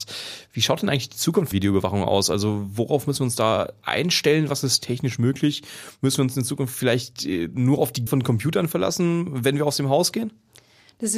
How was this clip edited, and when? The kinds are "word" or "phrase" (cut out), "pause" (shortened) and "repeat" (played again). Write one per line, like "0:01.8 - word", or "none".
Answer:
0:01.5 - word
0:08.1 - word